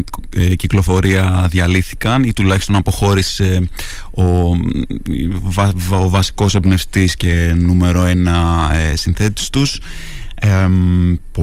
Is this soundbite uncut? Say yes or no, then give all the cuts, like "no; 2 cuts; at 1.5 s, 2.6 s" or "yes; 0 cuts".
yes; 0 cuts